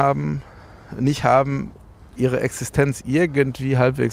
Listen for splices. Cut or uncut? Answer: uncut